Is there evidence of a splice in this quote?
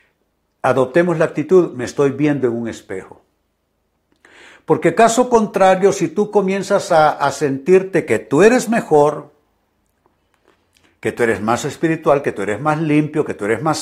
no; 0 cuts

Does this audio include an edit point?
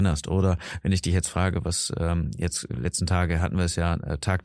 no; 0 cuts

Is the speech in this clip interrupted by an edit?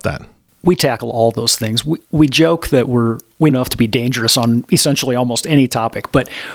yes; 2 cuts; at 2.0 s, 3.5 s

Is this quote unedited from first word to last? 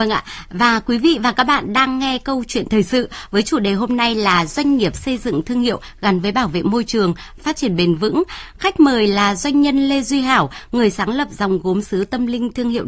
yes; 0 cuts

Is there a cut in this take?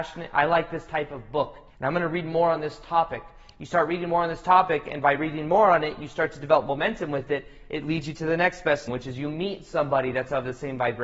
yes; 2 cuts; at 1.7 s, 8.9 s

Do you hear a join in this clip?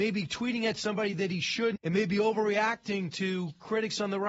yes; 1 cut; at 1.8 s

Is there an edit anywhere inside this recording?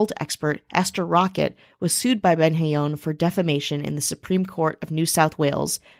no; 0 cuts

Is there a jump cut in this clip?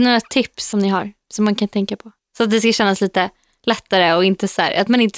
no; 0 cuts

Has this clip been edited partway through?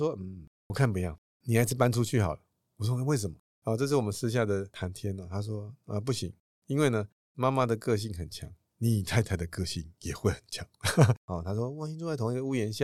no; 0 cuts

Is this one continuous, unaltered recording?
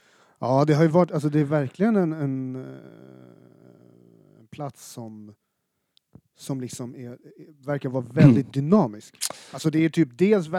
yes; 0 cuts

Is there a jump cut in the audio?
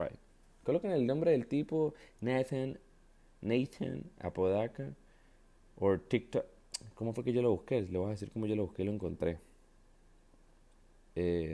no; 0 cuts

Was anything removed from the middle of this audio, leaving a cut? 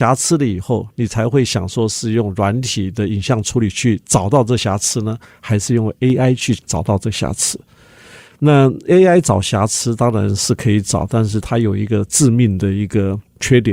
no; 0 cuts

